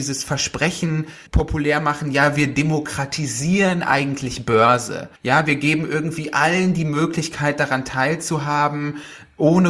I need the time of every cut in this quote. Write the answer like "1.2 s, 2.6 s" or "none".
1.3 s, 5.2 s